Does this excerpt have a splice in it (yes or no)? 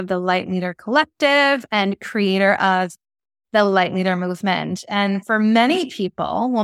no